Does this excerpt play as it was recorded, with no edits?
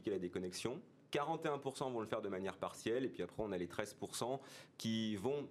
yes; 0 cuts

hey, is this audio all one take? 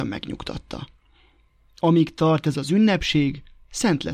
yes; 0 cuts

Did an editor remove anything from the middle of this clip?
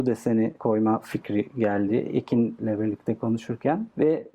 no; 0 cuts

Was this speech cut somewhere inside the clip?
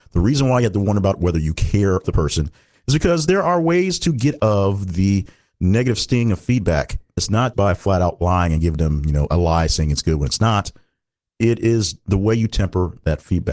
yes; 4 cuts; at 2.0 s, 4.4 s, 7.2 s, 7.5 s

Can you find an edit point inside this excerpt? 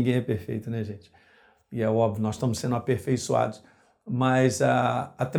no; 0 cuts

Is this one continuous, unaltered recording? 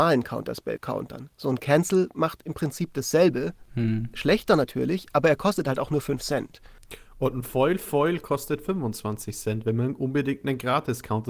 yes; 0 cuts

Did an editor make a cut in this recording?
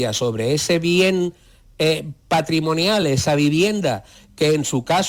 no; 0 cuts

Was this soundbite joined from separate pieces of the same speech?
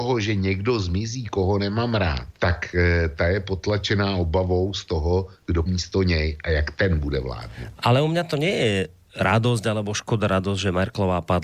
yes; 2 cuts; at 2.3 s, 5.7 s

